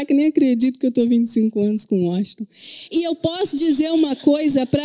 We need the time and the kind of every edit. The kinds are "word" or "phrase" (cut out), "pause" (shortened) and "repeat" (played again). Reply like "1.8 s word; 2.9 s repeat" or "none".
none